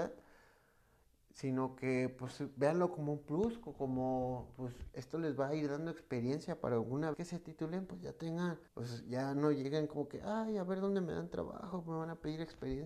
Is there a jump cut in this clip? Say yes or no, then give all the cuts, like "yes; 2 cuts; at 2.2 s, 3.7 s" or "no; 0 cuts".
yes; 2 cuts; at 7.1 s, 8.7 s